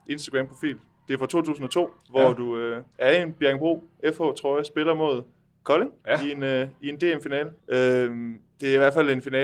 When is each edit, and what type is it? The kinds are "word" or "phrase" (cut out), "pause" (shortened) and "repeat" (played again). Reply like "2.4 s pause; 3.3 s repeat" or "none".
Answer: 2.0 s pause; 2.9 s pause; 6.0 s pause; 7.6 s pause